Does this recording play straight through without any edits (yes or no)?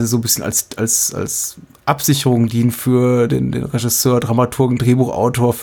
yes